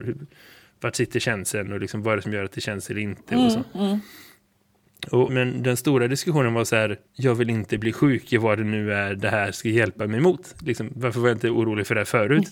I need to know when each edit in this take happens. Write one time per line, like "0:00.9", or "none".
0:05.3
0:07.1